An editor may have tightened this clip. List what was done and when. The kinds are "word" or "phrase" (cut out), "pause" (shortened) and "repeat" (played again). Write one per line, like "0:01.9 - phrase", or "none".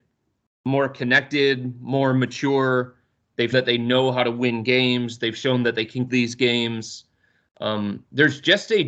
0:03.5 - word
0:06.1 - word

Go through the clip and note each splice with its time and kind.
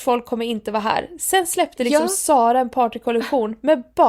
none

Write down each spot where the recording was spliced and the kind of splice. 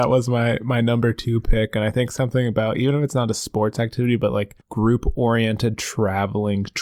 0:04.6 - pause

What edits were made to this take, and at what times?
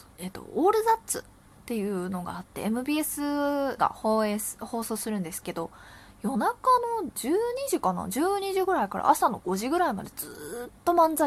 0:03.8 - word

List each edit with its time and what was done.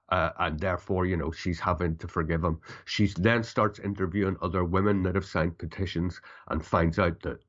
none

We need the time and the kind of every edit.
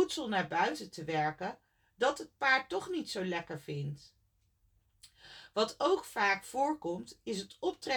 none

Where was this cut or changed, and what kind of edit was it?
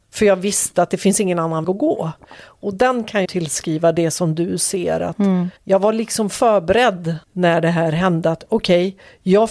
0:01.6 - word
0:03.2 - phrase
0:05.6 - pause
0:07.2 - pause

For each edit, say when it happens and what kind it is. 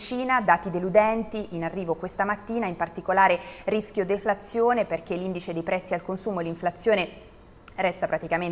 none

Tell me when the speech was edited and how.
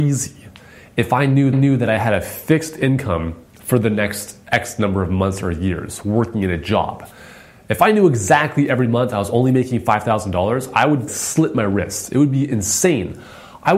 0:01.5 - repeat
0:03.5 - pause
0:11.1 - word

